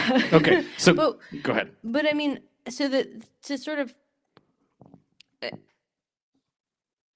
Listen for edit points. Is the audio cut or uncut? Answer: uncut